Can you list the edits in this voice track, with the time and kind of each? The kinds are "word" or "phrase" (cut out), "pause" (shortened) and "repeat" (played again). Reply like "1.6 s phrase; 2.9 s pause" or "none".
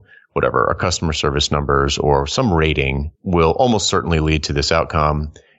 3.1 s pause